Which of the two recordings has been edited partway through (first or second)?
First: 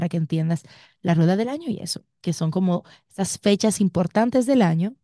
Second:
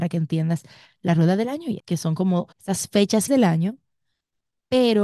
second